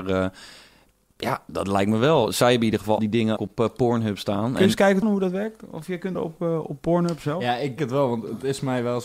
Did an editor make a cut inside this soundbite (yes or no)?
yes